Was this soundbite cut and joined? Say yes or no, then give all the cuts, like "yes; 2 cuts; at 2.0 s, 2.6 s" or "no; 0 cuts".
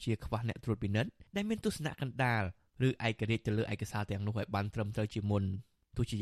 yes; 1 cut; at 1.3 s